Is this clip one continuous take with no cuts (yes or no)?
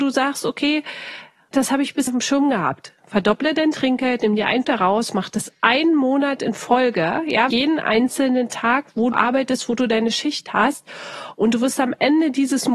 no